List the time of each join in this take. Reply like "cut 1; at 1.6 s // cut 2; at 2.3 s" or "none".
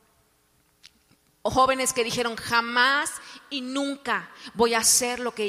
none